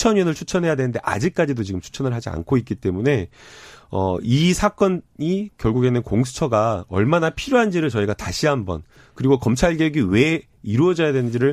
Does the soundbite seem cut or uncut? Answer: uncut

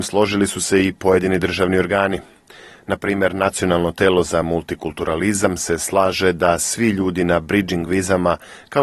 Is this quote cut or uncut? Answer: uncut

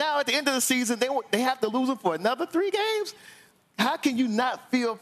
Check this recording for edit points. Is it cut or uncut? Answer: uncut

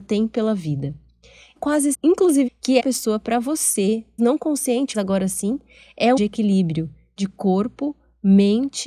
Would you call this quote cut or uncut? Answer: cut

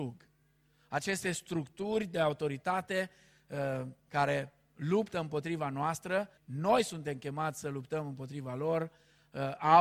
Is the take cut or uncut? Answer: cut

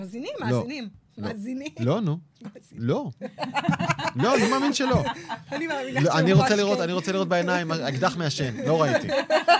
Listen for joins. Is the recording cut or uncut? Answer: uncut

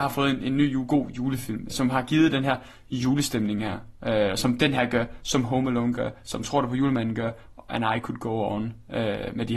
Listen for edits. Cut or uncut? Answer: cut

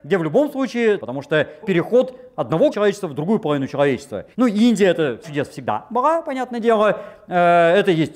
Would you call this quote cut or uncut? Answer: cut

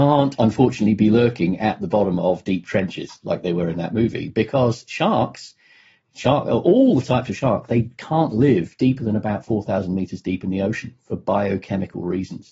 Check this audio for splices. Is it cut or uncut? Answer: uncut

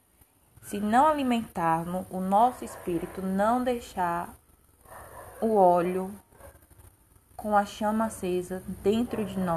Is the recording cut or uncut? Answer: uncut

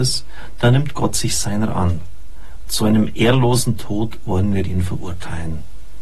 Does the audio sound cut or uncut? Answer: uncut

